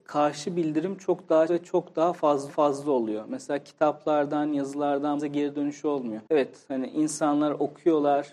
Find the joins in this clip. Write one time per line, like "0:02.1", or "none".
0:01.5
0:02.5
0:05.2
0:06.3